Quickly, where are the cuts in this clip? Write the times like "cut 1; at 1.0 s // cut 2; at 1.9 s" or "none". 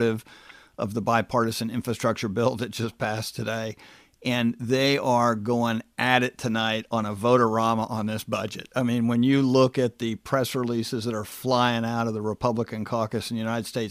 none